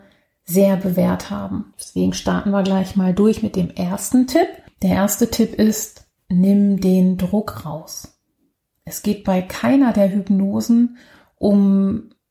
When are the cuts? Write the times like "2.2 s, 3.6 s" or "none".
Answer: 1.7 s

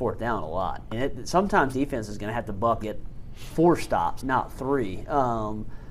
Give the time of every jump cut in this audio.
0.9 s, 1.7 s, 2.8 s, 4.2 s

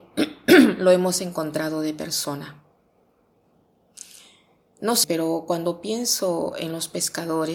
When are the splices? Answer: 5.0 s

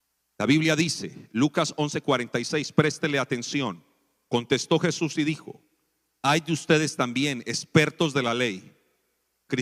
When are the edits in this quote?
none

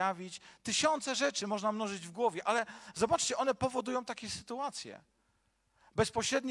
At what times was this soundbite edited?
none

